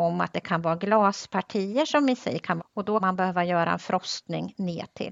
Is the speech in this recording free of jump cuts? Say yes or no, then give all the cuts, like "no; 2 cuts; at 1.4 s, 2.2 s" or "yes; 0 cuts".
no; 2 cuts; at 2.6 s, 3.0 s